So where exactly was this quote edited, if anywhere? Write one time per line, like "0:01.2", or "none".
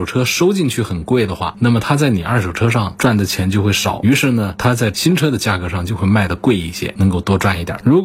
none